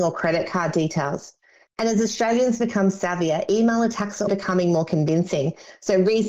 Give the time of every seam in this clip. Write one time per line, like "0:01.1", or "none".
0:04.3